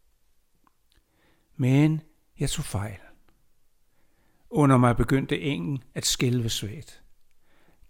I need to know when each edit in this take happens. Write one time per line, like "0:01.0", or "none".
none